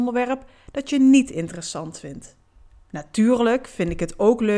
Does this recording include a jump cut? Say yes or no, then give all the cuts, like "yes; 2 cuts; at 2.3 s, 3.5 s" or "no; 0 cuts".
yes; 1 cut; at 2.5 s